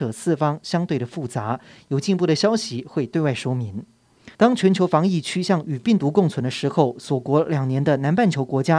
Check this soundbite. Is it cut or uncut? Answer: cut